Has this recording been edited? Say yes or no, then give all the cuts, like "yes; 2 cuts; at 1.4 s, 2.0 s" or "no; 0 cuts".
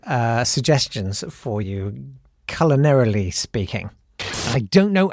no; 0 cuts